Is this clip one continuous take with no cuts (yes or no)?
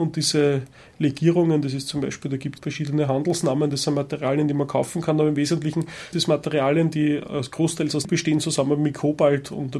no